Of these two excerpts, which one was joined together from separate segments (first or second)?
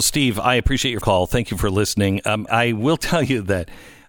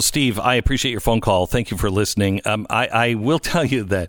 first